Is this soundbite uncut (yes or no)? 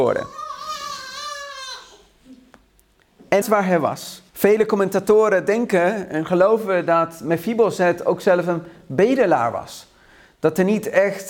no